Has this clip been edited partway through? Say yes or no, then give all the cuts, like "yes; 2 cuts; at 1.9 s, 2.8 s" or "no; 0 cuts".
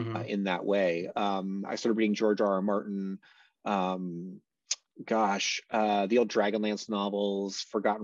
no; 0 cuts